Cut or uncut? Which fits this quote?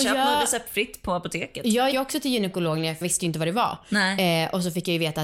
cut